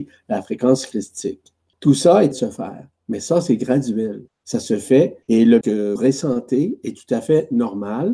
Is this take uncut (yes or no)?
no